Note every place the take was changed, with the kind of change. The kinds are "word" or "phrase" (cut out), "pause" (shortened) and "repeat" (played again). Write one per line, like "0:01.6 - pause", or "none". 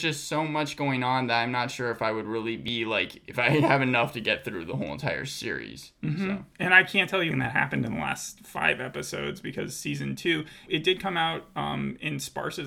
0:07.3 - word
0:10.7 - word